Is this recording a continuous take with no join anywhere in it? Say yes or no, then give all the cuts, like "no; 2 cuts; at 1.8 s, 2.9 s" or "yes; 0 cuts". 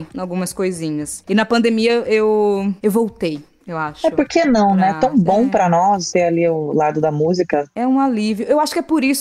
yes; 0 cuts